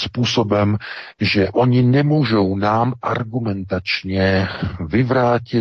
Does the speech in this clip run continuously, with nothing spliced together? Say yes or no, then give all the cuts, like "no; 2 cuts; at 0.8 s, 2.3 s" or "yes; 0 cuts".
yes; 0 cuts